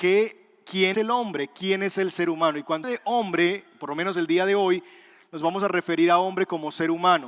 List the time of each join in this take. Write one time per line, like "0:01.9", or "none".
0:00.9
0:02.8